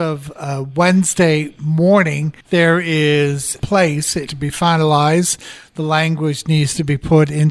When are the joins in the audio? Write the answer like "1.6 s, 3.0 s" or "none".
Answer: 2.4 s, 3.6 s, 4.3 s